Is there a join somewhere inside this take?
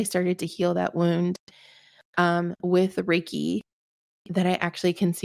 no; 0 cuts

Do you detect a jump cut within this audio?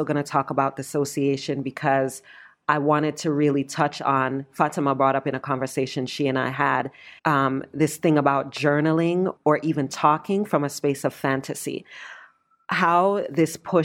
yes; 1 cut; at 7.2 s

